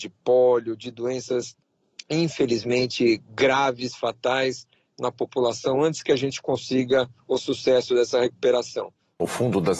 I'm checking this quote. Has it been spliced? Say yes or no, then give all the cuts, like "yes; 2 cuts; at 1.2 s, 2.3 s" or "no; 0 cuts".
no; 0 cuts